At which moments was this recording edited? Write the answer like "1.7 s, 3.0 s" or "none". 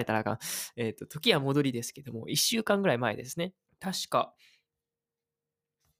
3.7 s